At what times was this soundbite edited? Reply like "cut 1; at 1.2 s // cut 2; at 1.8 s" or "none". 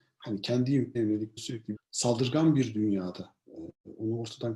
cut 1; at 0.9 s // cut 2; at 1.4 s // cut 3; at 1.7 s